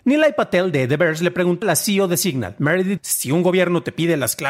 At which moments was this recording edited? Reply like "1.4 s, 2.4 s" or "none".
1.6 s, 3.0 s